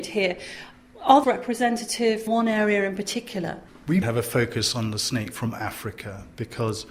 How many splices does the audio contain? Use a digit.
4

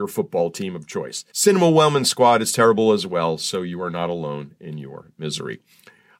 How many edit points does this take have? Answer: 1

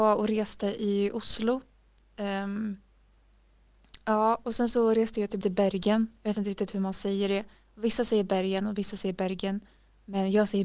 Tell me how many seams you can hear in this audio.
1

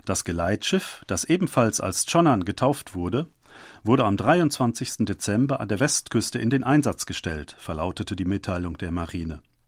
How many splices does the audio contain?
0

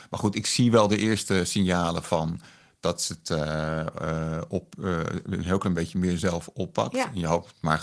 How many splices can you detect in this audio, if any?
0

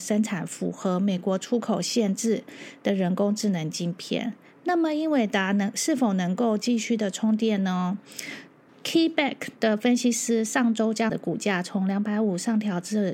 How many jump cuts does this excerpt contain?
2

